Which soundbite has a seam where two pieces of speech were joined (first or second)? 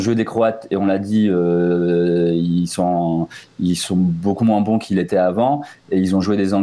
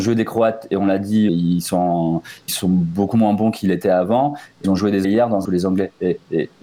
second